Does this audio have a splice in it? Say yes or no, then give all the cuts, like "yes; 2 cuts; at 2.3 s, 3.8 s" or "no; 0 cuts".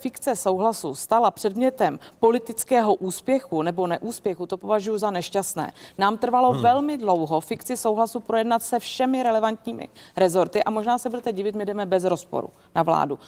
no; 0 cuts